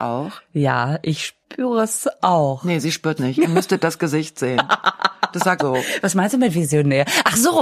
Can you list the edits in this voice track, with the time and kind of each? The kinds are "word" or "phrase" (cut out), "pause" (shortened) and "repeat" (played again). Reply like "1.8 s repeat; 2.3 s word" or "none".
1.4 s pause; 3.2 s word; 5.6 s phrase